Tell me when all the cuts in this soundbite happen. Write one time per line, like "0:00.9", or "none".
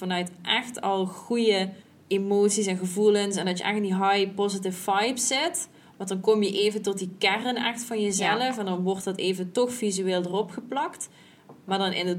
0:01.8